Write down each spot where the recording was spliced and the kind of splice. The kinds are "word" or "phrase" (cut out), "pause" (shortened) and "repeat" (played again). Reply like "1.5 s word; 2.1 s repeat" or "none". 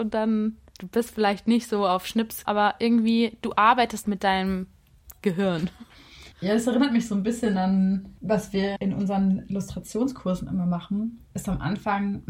2.4 s word; 4.0 s word; 6.3 s pause; 8.2 s pause; 8.8 s word